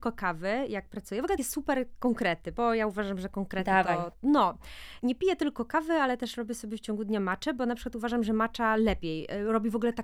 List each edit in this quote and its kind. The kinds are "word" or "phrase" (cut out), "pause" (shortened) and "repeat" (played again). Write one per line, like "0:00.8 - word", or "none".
0:01.4 - phrase
0:05.0 - word